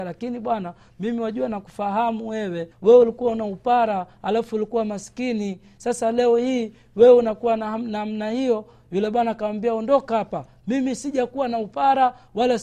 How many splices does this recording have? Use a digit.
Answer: 1